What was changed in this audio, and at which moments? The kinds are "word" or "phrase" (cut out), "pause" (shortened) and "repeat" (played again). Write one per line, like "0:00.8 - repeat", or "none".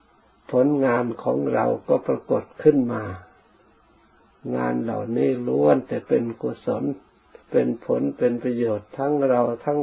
0:07.4 - pause